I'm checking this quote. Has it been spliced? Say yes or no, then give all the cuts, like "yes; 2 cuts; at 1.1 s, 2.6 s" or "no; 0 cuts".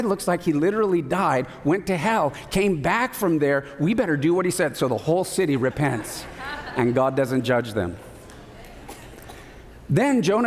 no; 0 cuts